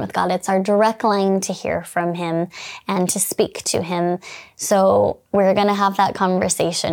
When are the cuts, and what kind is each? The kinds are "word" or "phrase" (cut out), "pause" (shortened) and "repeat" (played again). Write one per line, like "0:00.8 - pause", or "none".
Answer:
0:05.3 - pause